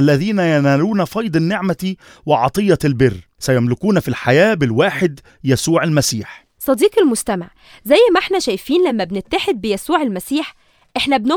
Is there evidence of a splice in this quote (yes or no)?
no